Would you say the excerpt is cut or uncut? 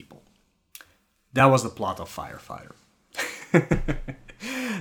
uncut